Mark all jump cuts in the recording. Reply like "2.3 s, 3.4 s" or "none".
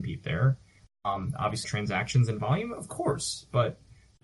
1.6 s